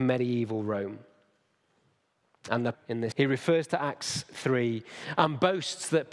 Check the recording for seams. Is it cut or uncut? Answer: cut